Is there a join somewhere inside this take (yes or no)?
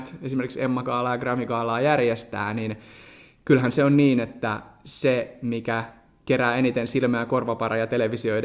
no